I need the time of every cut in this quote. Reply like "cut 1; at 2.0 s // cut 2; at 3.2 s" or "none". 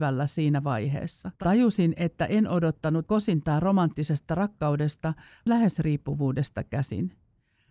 cut 1; at 1.3 s // cut 2; at 3.1 s // cut 3; at 5.5 s

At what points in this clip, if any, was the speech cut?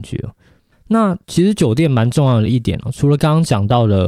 cut 1; at 1.2 s

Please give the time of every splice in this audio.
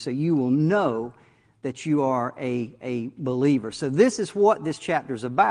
none

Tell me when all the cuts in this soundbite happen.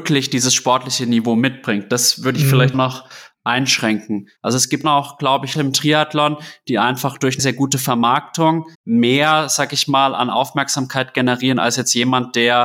cut 1; at 2.7 s // cut 2; at 4.4 s // cut 3; at 4.8 s // cut 4; at 5.5 s // cut 5; at 7.4 s // cut 6; at 8.7 s

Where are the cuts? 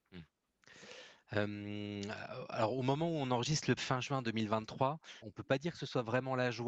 cut 1; at 3.8 s // cut 2; at 5.2 s

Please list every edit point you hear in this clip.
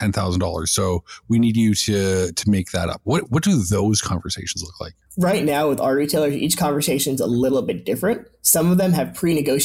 none

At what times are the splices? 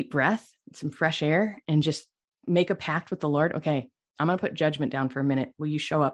none

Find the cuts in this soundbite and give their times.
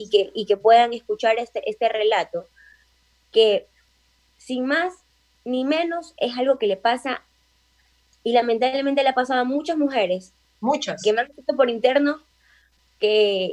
none

